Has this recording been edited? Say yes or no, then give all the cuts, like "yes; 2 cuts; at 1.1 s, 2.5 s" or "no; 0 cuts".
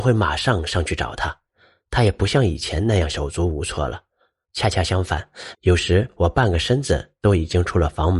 no; 0 cuts